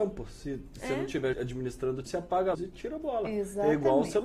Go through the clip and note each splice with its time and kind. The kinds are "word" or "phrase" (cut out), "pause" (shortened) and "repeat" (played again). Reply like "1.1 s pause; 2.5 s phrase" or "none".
1.3 s word; 2.1 s word; 2.5 s word